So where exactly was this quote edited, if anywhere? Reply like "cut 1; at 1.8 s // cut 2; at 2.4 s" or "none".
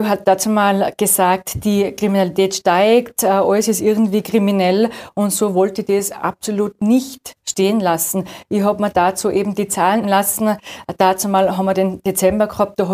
cut 1; at 10.0 s